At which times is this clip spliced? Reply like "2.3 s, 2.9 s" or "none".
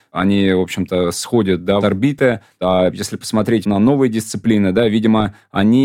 1.8 s, 3.6 s